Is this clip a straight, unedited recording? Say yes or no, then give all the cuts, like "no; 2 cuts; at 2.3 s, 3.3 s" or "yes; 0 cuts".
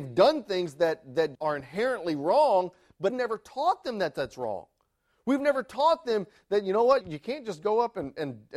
no; 3 cuts; at 1.3 s, 3.1 s, 7.0 s